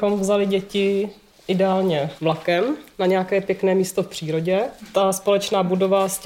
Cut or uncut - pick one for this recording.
uncut